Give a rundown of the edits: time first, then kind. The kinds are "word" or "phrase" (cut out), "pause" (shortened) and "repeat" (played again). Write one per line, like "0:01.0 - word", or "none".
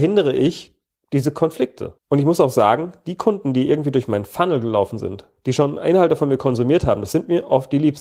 0:02.0 - pause